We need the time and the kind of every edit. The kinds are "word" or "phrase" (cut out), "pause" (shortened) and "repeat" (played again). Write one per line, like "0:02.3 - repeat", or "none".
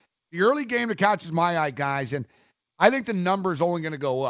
none